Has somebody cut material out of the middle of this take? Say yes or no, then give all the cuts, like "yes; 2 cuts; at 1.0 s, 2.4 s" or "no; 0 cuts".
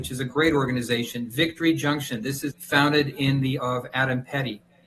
yes; 2 cuts; at 2.5 s, 3.6 s